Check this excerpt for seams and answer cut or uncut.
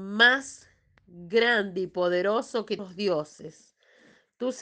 cut